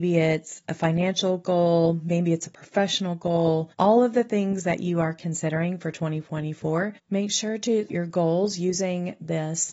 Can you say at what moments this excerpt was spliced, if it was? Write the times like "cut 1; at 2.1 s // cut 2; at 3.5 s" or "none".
cut 1; at 3.7 s // cut 2; at 7.0 s // cut 3; at 7.9 s